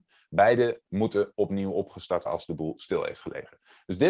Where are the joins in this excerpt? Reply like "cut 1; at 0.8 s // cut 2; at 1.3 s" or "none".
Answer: cut 1; at 2.3 s